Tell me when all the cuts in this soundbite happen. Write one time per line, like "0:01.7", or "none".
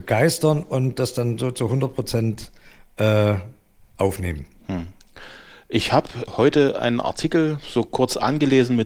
none